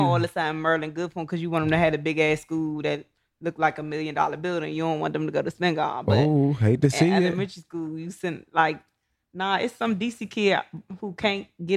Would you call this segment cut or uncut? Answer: uncut